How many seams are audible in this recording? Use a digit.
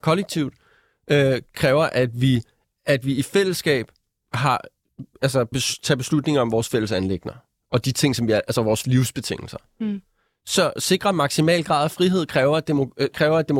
4